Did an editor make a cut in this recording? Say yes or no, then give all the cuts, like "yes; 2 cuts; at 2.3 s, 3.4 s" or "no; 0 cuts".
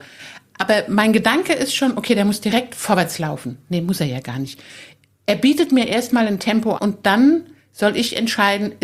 yes; 1 cut; at 6.8 s